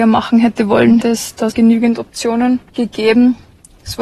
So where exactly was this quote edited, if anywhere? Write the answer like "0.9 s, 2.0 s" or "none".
1.0 s, 1.5 s, 2.7 s

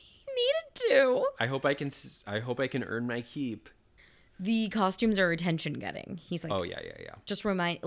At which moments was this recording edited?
none

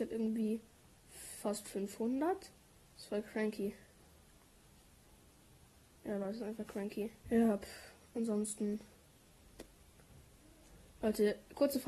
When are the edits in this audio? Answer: 2.6 s, 7.2 s

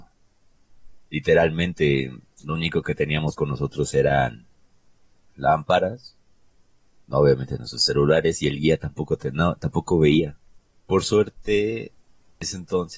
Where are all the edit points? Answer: none

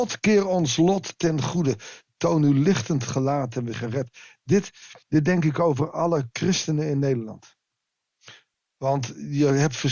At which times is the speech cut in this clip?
3.7 s, 5.0 s, 8.5 s

